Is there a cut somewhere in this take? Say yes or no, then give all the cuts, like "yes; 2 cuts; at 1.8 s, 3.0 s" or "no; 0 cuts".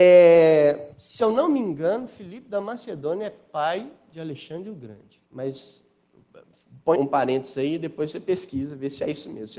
yes; 3 cuts; at 0.9 s, 5.3 s, 7.0 s